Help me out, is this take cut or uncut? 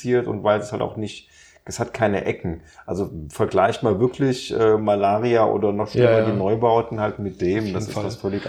uncut